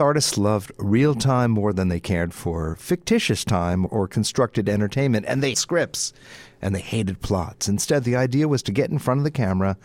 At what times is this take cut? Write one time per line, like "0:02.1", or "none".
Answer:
0:03.9
0:05.5